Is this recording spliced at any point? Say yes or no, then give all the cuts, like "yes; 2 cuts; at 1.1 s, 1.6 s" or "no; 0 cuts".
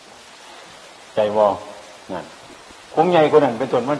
yes; 2 cuts; at 2.0 s, 2.8 s